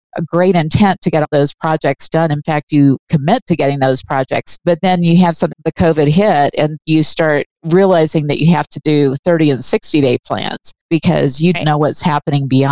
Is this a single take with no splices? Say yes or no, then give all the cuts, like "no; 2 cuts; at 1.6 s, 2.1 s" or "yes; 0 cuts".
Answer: no; 5 cuts; at 1.2 s, 4.6 s, 5.5 s, 6.8 s, 11.5 s